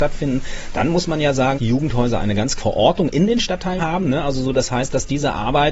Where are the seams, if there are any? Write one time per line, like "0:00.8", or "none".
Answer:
0:01.5
0:02.6
0:03.8